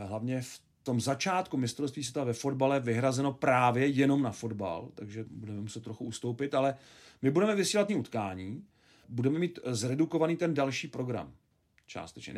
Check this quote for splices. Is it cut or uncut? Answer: cut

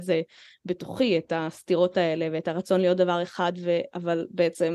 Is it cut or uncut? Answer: uncut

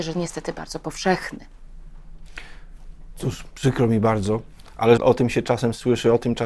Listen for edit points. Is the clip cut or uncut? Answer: cut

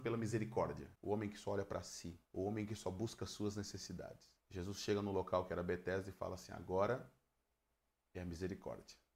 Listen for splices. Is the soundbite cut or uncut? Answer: cut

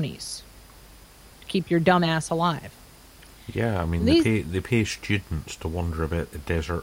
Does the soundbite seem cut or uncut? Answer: uncut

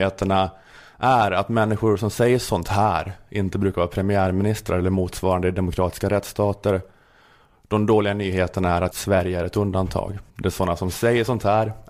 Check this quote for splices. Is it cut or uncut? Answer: cut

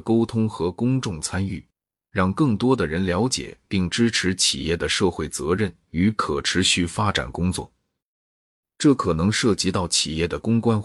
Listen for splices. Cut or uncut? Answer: uncut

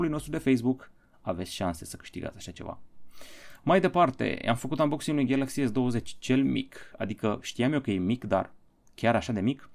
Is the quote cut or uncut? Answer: uncut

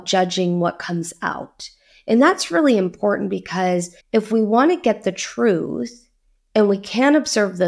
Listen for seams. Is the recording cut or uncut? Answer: cut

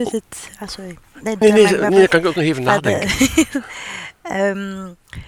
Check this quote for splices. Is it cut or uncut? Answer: cut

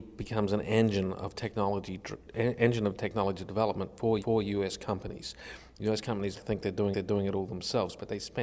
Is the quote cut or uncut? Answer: cut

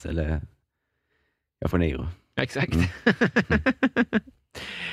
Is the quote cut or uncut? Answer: cut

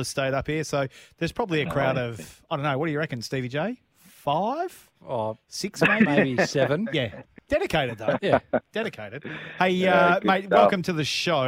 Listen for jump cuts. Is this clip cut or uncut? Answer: uncut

